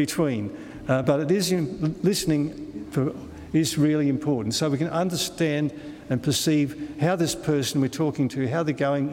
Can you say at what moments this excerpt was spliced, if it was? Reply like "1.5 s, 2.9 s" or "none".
none